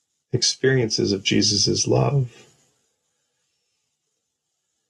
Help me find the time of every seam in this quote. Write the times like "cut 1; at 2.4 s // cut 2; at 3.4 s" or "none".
none